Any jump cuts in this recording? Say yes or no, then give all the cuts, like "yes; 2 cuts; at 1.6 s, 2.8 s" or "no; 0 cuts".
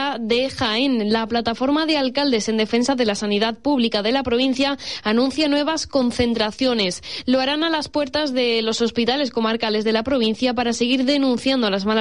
no; 0 cuts